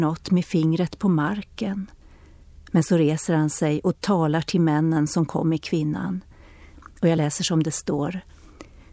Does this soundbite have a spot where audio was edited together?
no; 0 cuts

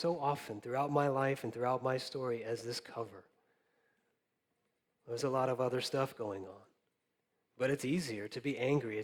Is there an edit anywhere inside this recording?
no; 0 cuts

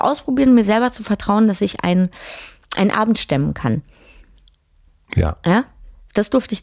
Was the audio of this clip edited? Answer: no; 0 cuts

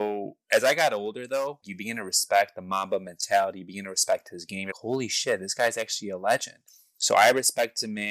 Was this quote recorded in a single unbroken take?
no; 3 cuts; at 1.6 s, 4.7 s, 6.7 s

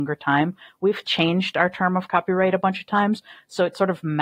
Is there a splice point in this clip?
no; 0 cuts

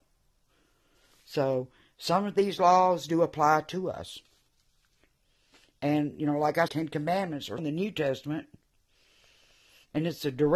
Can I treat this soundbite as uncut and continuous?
no; 2 cuts; at 6.7 s, 7.6 s

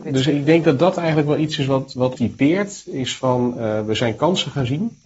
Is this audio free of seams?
no; 1 cut; at 2.2 s

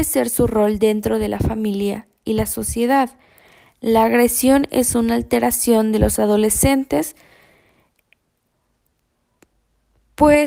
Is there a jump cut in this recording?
no; 0 cuts

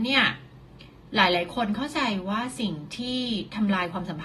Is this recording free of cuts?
yes; 0 cuts

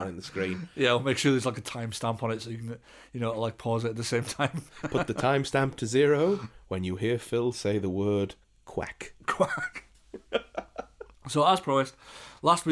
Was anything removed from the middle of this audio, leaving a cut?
no; 0 cuts

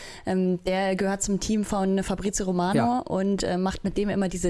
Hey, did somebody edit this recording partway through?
no; 0 cuts

